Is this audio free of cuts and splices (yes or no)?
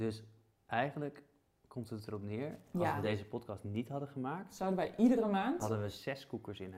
yes